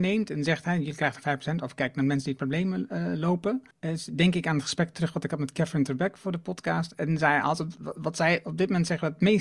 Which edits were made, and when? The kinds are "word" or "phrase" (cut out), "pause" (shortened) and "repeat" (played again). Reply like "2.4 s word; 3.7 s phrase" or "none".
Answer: 3.7 s pause

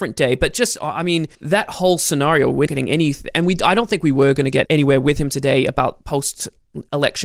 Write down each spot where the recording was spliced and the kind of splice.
1.3 s pause; 2.7 s word; 4.7 s word

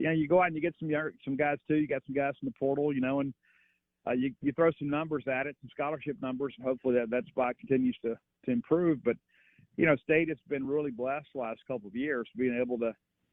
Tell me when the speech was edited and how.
none

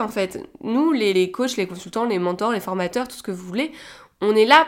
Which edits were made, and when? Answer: 1.1 s word

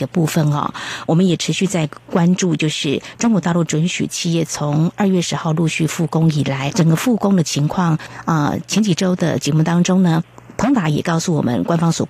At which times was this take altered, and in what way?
6.7 s word

